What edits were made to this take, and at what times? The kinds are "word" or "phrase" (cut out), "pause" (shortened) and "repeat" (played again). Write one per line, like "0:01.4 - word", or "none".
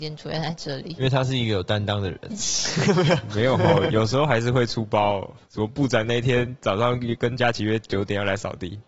0:02.3 - word